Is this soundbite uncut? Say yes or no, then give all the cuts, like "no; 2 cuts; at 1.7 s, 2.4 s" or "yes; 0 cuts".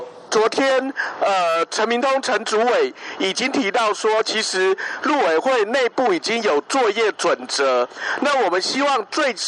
yes; 0 cuts